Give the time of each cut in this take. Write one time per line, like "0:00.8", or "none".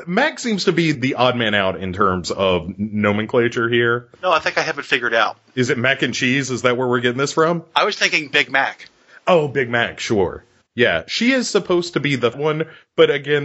0:00.9
0:04.1
0:10.6
0:12.3